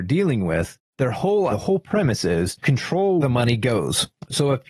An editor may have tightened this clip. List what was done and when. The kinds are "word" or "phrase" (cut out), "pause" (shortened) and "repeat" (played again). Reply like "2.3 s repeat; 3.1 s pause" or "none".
1.5 s word; 2.6 s word; 3.2 s word